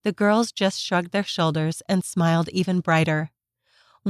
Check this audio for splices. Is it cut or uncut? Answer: uncut